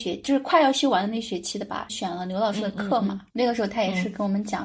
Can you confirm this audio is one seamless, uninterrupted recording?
no; 1 cut; at 3.3 s

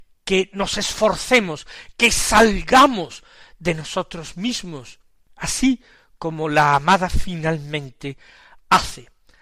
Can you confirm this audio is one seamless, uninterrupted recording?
yes; 0 cuts

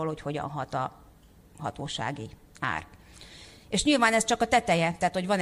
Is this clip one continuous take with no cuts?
no; 1 cut; at 3.6 s

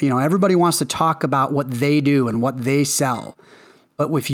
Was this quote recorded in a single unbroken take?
yes; 0 cuts

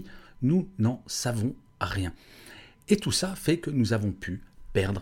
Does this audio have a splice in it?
no; 0 cuts

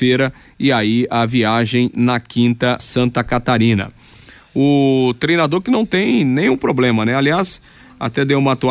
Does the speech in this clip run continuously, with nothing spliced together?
no; 1 cut; at 2.8 s

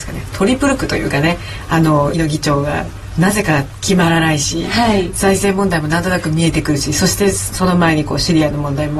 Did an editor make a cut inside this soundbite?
yes; 1 cut; at 2.1 s

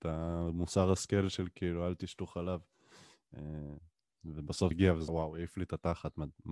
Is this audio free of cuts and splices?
no; 2 cuts; at 4.7 s, 5.1 s

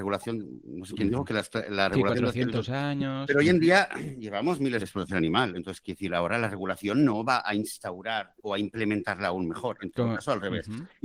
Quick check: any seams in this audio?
yes; 2 cuts; at 4.8 s, 8.4 s

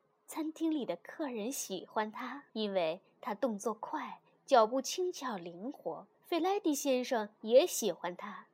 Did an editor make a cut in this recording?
yes; 2 cuts; at 2.5 s, 6.1 s

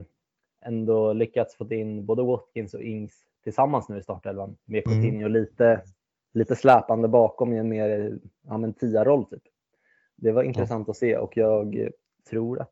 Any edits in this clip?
no; 0 cuts

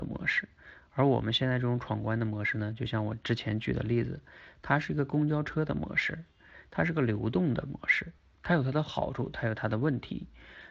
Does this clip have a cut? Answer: no; 0 cuts

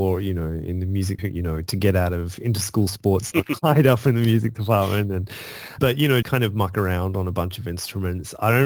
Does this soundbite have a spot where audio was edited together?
yes; 4 cuts; at 1.2 s, 3.3 s, 5.8 s, 6.2 s

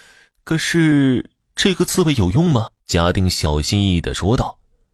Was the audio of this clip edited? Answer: yes; 1 cut; at 2.8 s

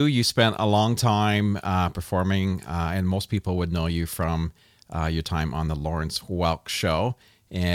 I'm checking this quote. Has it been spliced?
no; 0 cuts

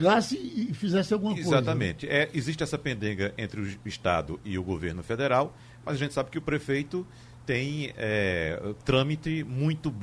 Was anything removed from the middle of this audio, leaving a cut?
no; 0 cuts

